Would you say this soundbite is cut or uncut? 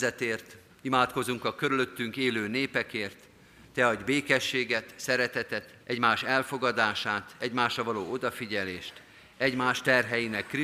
cut